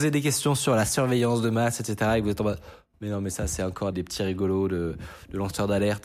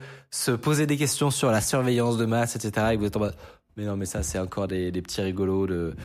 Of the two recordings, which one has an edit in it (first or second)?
first